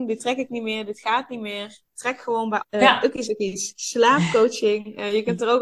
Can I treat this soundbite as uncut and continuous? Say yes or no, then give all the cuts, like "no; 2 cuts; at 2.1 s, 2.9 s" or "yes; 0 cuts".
no; 2 cuts; at 2.6 s, 3.2 s